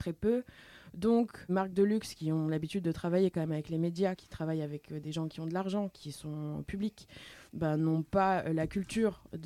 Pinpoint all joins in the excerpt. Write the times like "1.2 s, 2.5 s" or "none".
1.5 s, 4.2 s, 7.5 s